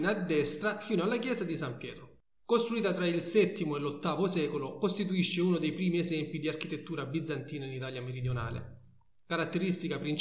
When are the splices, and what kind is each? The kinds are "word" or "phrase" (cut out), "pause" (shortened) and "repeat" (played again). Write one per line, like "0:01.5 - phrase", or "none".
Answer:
none